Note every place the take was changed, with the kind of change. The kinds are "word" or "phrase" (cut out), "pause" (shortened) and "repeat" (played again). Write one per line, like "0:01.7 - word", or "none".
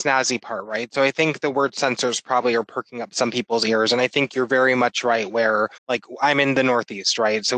0:05.8 - pause